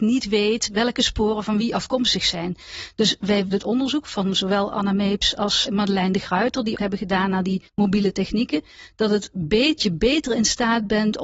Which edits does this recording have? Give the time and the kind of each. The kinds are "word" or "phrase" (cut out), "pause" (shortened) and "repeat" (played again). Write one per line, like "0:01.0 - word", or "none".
0:03.5 - phrase
0:05.6 - word
0:06.7 - word
0:07.7 - pause
0:09.8 - word

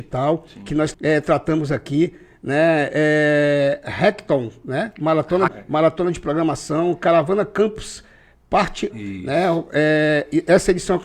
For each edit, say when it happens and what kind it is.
0:00.9 - word
0:05.5 - word
0:08.9 - word

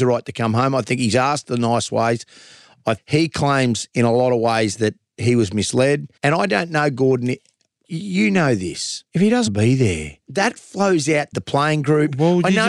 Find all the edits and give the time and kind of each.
0:03.0 - word
0:06.2 - pause
0:07.8 - word
0:09.1 - pause
0:09.5 - word
0:10.2 - pause
0:11.3 - phrase

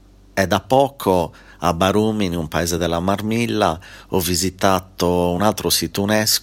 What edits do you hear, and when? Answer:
none

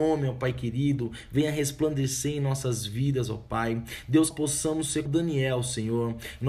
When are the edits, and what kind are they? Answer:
0:04.3 - word
0:05.1 - word

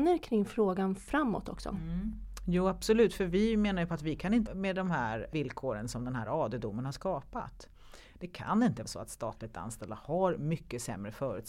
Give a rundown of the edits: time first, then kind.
0:04.5 - word
0:08.9 - word

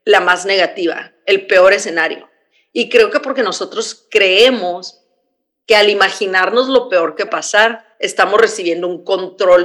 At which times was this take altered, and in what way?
0:07.3 - word
0:07.9 - pause

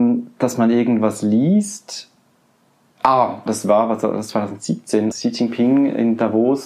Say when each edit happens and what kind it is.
0:03.5 - word
0:05.1 - word

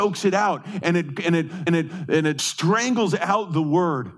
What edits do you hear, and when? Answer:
0:01.7 - repeat
0:02.4 - word

